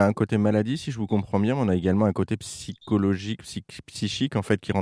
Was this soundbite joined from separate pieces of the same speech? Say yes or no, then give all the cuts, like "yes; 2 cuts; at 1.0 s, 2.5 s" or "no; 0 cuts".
no; 0 cuts